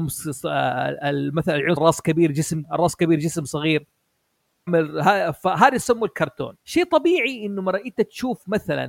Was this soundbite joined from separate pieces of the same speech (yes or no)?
yes